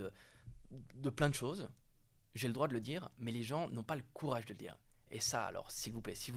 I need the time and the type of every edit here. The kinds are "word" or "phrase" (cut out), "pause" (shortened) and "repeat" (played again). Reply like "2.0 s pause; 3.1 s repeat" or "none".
none